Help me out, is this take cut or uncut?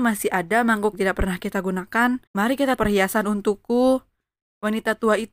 cut